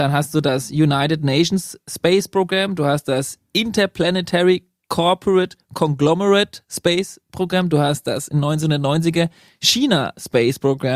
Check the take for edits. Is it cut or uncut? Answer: uncut